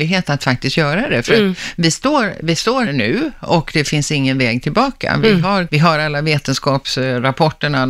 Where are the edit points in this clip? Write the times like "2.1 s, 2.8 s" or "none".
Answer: 2.9 s, 5.7 s